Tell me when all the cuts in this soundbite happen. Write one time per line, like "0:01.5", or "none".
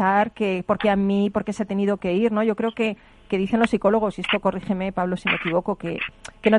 none

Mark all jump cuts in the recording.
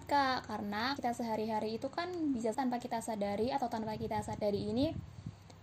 0:01.0
0:02.5

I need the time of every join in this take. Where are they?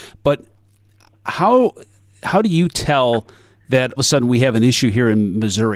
0:04.0

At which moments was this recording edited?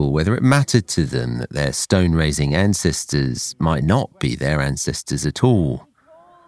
none

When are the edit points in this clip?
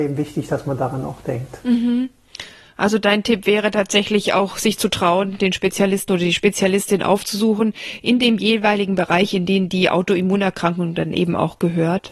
none

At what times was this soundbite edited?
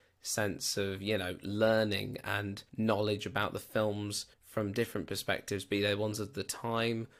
0:02.7
0:04.3

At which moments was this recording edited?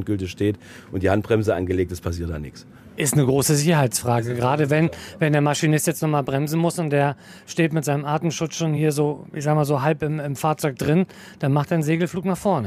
none

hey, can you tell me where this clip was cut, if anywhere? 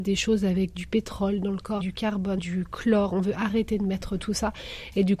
0:01.8
0:02.4

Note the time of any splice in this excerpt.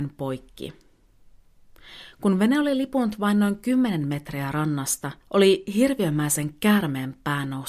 0:05.2

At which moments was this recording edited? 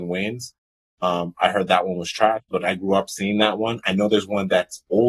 none

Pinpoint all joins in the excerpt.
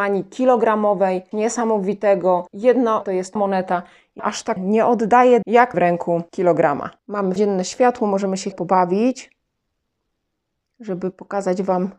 0:01.3
0:03.0
0:03.4
0:04.2
0:04.6
0:05.4
0:05.7
0:07.4
0:08.5

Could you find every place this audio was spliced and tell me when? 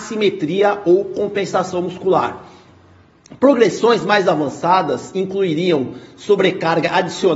none

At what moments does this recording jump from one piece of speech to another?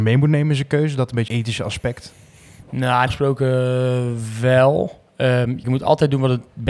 0:01.3
0:03.1
0:05.6

